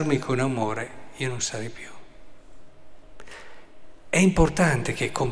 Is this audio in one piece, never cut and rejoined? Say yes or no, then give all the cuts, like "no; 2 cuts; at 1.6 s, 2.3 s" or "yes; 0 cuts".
yes; 0 cuts